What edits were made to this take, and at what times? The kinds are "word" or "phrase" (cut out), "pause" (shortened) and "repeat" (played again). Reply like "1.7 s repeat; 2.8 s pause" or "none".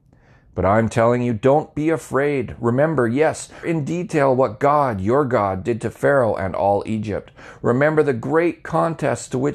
3.6 s word